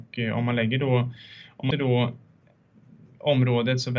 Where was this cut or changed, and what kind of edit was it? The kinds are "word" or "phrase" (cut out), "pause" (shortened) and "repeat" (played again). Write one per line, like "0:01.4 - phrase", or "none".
0:01.7 - word